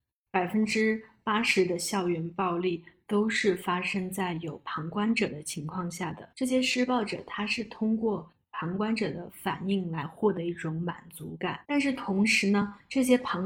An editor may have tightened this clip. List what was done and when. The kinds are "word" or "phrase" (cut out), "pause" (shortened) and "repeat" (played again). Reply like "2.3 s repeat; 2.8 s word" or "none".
6.3 s pause; 11.6 s pause